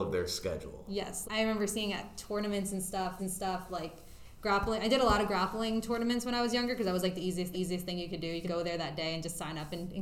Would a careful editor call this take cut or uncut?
cut